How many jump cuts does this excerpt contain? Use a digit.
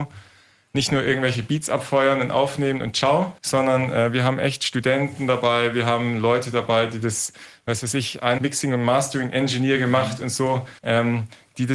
3